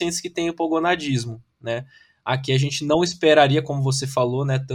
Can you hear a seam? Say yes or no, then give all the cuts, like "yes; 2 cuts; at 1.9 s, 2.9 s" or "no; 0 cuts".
no; 0 cuts